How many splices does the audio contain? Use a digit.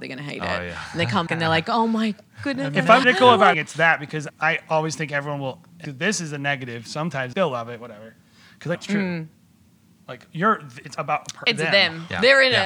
8